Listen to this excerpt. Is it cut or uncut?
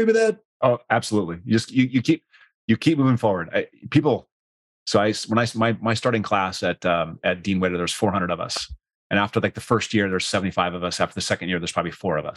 uncut